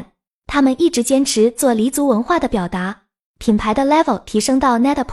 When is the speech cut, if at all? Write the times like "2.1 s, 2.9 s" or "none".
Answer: none